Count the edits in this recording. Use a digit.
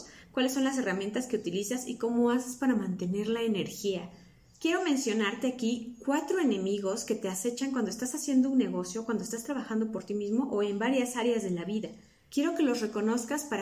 0